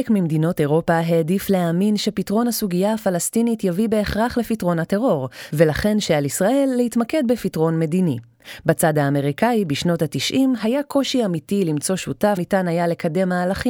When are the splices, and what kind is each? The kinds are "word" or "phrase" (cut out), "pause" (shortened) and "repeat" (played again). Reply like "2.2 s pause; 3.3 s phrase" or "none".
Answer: 12.4 s word